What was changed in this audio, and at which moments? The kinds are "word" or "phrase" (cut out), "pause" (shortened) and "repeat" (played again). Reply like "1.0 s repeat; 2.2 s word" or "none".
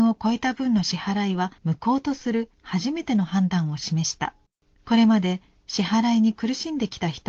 1.6 s pause; 2.5 s pause; 4.5 s pause